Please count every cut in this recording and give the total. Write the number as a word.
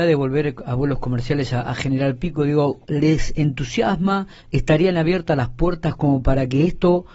one